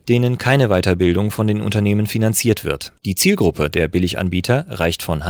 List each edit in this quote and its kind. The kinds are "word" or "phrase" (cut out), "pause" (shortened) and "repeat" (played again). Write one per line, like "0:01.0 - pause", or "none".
0:03.0 - pause